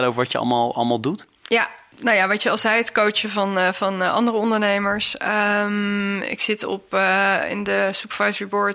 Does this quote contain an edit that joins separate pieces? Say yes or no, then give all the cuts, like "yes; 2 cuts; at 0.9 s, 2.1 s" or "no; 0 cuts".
no; 0 cuts